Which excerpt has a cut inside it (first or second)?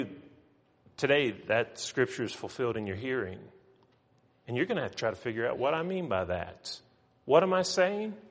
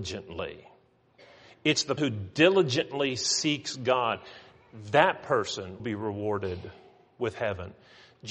second